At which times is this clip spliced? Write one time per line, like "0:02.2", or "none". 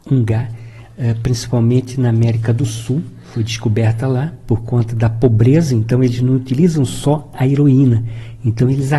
none